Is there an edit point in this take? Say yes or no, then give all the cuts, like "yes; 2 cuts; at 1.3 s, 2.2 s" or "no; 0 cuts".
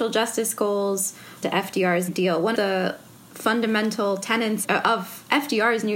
yes; 5 cuts; at 1.4 s, 2.1 s, 2.5 s, 3.1 s, 4.6 s